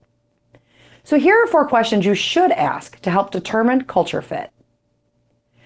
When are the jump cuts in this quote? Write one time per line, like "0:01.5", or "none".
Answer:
none